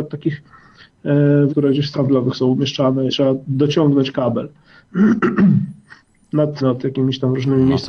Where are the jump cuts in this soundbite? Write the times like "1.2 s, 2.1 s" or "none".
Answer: 1.5 s, 1.9 s, 3.1 s, 6.6 s